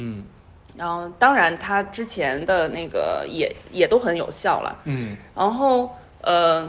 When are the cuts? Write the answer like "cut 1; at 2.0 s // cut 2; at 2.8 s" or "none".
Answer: none